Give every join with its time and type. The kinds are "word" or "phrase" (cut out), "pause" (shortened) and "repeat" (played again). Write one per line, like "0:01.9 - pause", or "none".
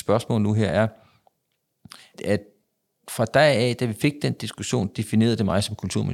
0:02.1 - word